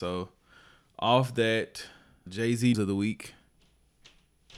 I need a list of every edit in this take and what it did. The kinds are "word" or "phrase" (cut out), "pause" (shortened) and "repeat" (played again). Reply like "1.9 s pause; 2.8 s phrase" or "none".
2.3 s word; 2.7 s word

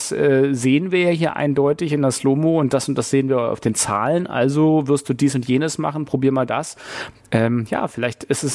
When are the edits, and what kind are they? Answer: none

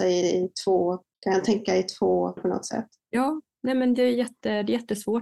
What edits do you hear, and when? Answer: 1.1 s pause; 2.4 s word

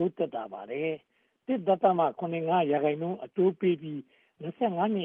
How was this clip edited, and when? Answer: none

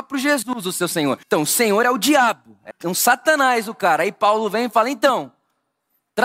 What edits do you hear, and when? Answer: 1.2 s pause; 2.7 s word

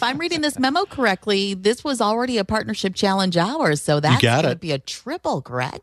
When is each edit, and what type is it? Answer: none

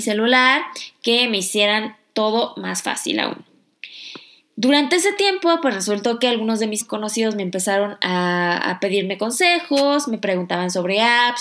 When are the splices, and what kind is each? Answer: 6.8 s word

